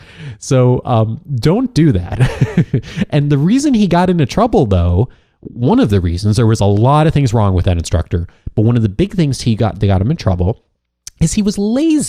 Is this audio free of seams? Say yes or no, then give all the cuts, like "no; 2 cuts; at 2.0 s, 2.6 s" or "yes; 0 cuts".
yes; 0 cuts